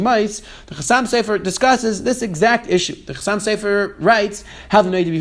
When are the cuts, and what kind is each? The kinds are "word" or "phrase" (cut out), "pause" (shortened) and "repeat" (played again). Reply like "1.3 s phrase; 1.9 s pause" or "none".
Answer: none